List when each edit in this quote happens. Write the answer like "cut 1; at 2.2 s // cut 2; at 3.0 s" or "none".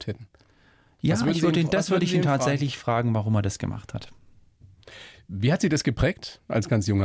none